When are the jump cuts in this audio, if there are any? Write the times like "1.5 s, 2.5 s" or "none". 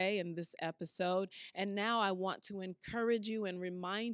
none